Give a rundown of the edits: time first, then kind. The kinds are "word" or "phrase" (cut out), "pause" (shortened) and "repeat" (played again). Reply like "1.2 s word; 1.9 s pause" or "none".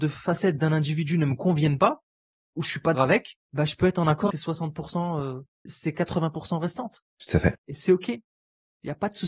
2.9 s word; 3.4 s pause; 4.3 s phrase; 5.7 s word; 7.1 s pause; 7.6 s pause